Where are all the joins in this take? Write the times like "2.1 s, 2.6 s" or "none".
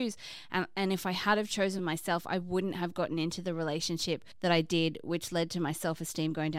none